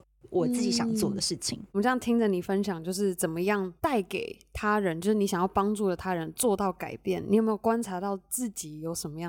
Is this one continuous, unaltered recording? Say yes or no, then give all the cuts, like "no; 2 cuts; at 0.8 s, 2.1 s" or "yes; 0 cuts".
no; 2 cuts; at 1.7 s, 3.8 s